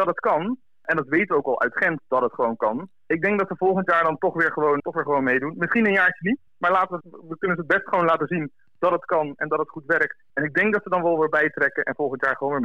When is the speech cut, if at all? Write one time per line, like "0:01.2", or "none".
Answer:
0:04.8
0:06.5
0:07.0
0:10.3